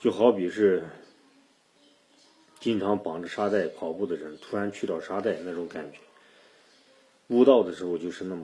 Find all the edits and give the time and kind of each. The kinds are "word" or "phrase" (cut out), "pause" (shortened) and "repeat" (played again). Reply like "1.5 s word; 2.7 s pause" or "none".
none